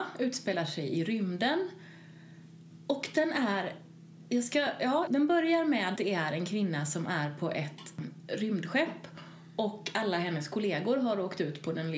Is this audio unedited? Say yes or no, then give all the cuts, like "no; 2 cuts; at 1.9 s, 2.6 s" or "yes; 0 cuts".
no; 2 cuts; at 5.1 s, 6.0 s